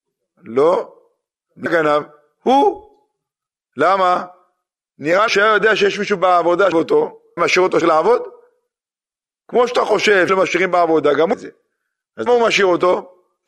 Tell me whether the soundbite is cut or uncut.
cut